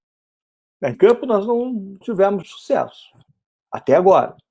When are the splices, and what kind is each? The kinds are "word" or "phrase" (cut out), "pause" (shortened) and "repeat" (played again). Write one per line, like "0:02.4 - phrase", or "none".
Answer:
0:00.9 - word
0:02.0 - word
0:02.4 - word
0:03.3 - pause